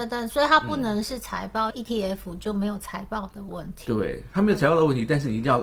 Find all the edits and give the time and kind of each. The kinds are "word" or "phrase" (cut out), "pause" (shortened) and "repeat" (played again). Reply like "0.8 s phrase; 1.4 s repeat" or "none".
1.7 s phrase